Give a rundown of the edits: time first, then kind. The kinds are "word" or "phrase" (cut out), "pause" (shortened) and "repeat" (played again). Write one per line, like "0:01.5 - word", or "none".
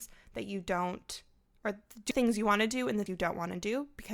0:02.1 - word
0:03.1 - word

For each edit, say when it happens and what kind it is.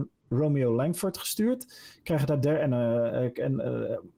none

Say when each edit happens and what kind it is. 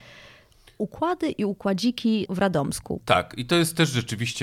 0:02.3 - word

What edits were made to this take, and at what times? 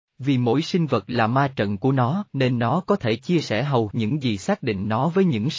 0:02.3 - pause
0:03.9 - word

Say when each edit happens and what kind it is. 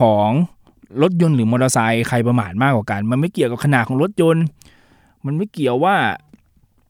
none

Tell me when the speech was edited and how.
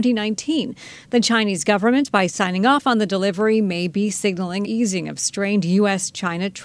0:04.6 - word

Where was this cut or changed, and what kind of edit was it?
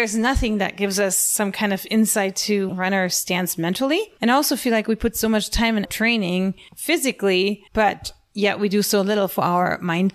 0:02.7 - phrase
0:05.8 - phrase
0:07.7 - pause

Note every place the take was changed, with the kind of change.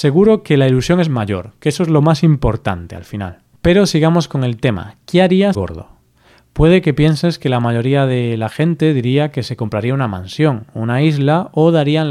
0:03.5 - pause
0:05.5 - phrase

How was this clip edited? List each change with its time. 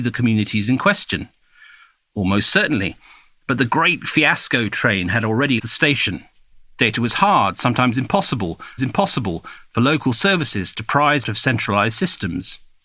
0:05.6 - word
0:08.8 - repeat
0:11.2 - word

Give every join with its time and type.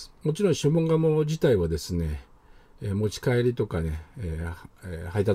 none

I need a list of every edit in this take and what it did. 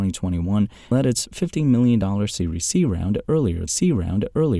0:00.9 - word
0:03.7 - repeat

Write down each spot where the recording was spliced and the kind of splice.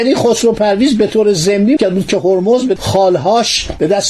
0:01.8 - word
0:02.8 - word

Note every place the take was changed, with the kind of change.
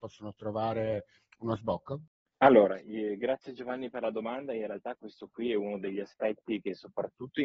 none

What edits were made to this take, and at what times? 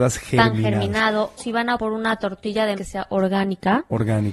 0:01.4 - word
0:01.8 - word
0:02.8 - word

